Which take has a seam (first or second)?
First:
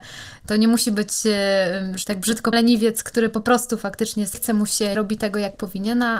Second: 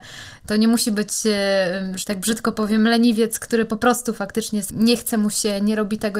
first